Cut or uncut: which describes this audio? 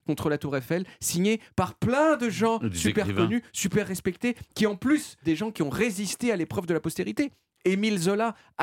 cut